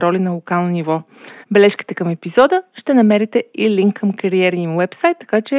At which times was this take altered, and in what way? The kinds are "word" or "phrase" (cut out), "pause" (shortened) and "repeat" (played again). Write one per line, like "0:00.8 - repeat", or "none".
0:01.4 - pause